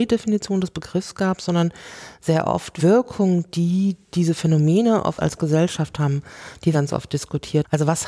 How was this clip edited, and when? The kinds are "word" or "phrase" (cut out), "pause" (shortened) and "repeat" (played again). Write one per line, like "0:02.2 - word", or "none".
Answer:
0:02.8 - phrase
0:05.2 - word
0:06.7 - word